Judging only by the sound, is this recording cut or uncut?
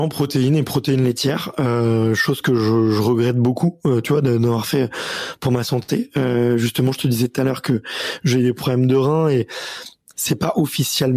uncut